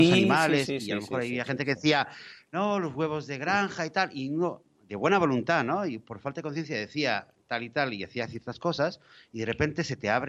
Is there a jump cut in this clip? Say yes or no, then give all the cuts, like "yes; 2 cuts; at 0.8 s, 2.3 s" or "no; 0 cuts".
no; 0 cuts